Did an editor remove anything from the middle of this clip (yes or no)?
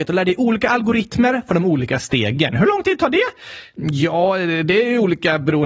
no